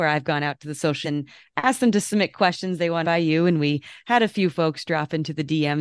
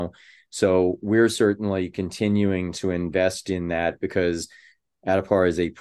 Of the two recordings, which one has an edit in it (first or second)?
first